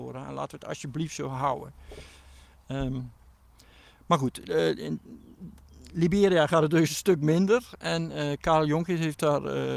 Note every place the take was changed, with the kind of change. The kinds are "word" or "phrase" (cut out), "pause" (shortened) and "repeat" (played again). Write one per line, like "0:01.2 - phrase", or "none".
none